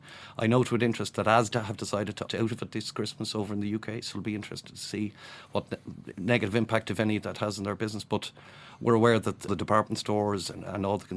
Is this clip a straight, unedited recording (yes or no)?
no